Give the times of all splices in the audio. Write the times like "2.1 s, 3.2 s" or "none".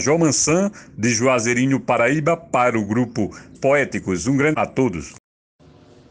3.5 s, 4.5 s